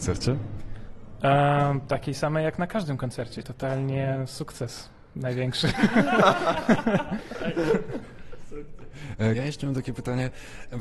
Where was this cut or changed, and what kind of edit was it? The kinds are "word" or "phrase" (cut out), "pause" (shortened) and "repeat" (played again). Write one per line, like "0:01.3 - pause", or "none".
0:03.4 - word
0:09.3 - word